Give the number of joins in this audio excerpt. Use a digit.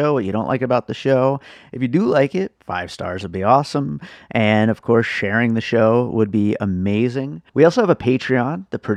2